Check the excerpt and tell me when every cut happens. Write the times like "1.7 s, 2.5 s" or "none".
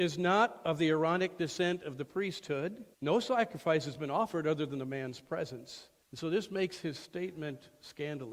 2.9 s, 6.0 s